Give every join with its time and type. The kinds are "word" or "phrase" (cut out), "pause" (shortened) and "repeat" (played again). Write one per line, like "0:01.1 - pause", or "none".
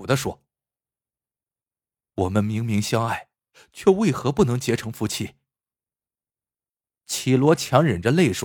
none